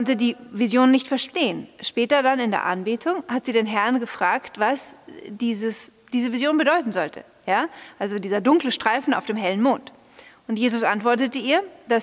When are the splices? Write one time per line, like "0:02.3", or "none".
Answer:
none